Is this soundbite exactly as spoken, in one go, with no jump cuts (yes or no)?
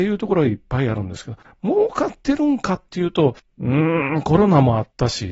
yes